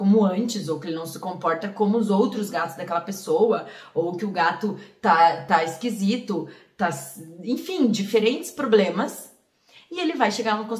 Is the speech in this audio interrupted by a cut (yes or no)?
no